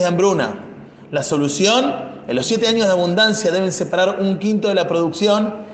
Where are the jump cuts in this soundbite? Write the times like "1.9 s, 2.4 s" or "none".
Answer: none